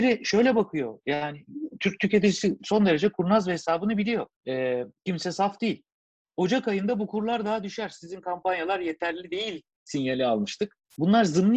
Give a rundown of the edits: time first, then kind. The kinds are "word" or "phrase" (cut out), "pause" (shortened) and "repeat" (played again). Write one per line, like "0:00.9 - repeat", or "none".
0:04.4 - pause